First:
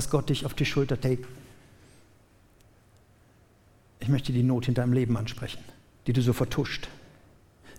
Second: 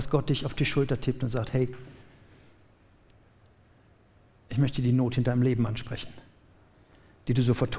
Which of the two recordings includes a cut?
first; 2 cuts; at 1.0 s, 6.0 s

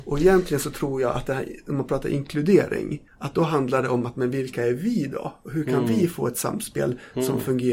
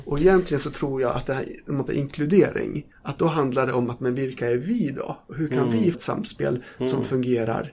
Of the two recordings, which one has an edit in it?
second; 2 cuts; at 1.9 s, 5.9 s

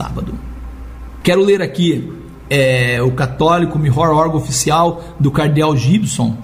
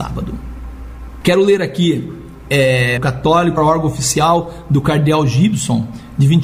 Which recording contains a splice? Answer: second; 2 cuts; at 3.0 s, 3.6 s

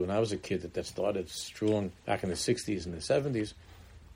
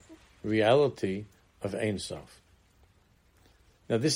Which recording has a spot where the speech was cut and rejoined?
first; 1 cut; at 2.0 s

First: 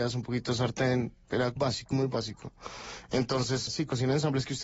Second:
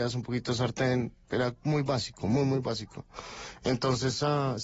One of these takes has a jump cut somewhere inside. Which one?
first; 3 cuts; at 1.6 s, 1.9 s, 3.7 s

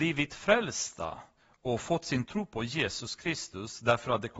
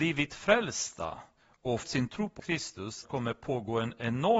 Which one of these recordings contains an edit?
second; 3 cuts; at 1.8 s, 2.4 s, 3.0 s

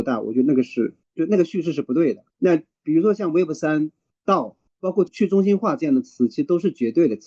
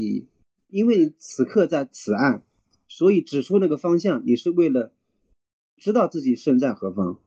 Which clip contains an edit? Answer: first; 3 cuts; at 1.0 s, 2.3 s, 4.7 s

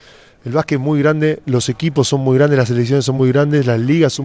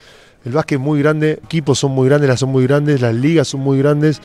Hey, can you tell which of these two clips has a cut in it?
second; 2 cuts; at 1.4 s, 2.4 s

